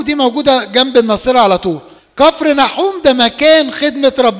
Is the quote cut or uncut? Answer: cut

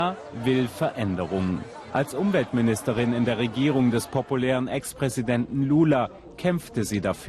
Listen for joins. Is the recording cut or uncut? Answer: uncut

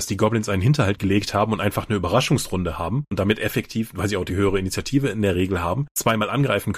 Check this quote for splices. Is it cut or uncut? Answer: uncut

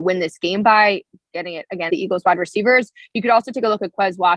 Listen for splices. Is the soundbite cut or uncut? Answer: cut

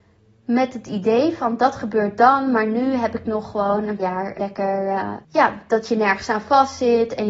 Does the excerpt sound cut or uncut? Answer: cut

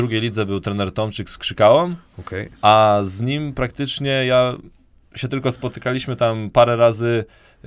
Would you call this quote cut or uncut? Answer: uncut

